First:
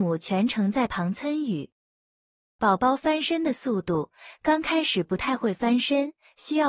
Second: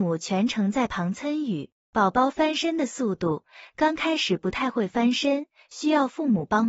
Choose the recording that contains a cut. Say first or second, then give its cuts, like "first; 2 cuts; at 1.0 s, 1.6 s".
second; 1 cut; at 1.8 s